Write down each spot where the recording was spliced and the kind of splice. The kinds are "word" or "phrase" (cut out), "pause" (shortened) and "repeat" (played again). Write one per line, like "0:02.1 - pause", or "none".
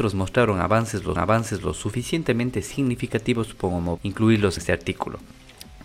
0:01.2 - repeat
0:04.0 - word
0:04.6 - word